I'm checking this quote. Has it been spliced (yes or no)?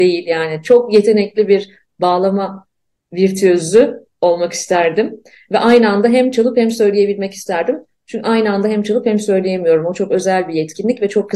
no